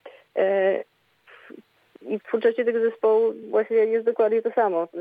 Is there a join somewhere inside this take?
no; 0 cuts

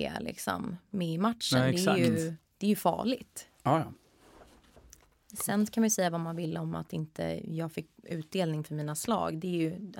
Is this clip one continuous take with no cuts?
no; 1 cut; at 2.4 s

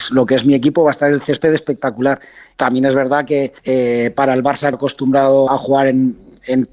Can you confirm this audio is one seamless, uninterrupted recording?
no; 3 cuts; at 3.6 s, 4.7 s, 5.5 s

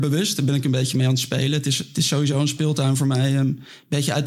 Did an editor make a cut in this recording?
no; 0 cuts

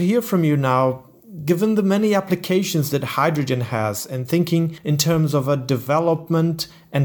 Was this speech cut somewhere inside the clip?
no; 0 cuts

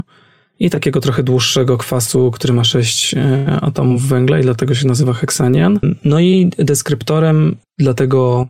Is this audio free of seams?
yes; 0 cuts

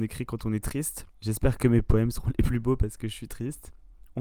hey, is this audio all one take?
yes; 0 cuts

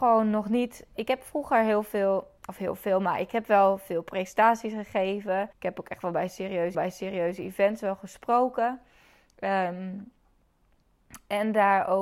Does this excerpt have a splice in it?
yes; 3 cuts; at 2.4 s, 5.5 s, 6.7 s

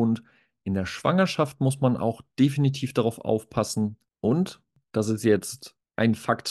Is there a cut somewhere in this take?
no; 0 cuts

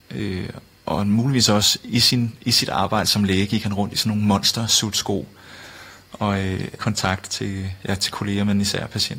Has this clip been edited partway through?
yes; 1 cut; at 6.8 s

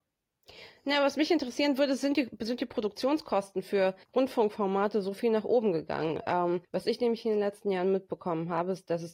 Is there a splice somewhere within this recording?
yes; 2 cuts; at 4.0 s, 6.6 s

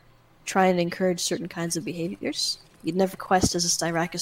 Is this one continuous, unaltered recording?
no; 1 cut; at 3.1 s

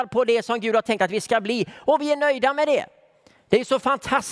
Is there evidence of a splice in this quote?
no; 0 cuts

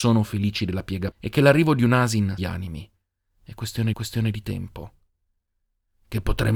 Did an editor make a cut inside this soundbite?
yes; 3 cuts; at 1.1 s, 2.4 s, 3.9 s

